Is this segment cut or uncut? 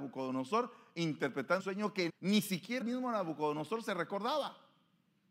cut